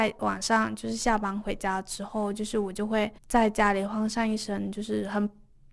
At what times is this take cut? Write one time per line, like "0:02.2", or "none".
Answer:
0:03.2